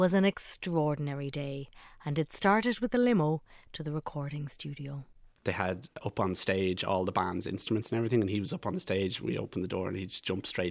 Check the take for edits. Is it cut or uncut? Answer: uncut